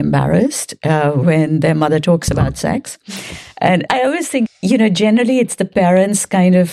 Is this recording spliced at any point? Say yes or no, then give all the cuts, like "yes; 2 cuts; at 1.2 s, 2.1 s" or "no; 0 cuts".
yes; 2 cuts; at 3.9 s, 4.5 s